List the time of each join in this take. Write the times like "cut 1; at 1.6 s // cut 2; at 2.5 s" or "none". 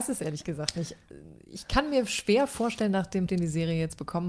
cut 1; at 3.3 s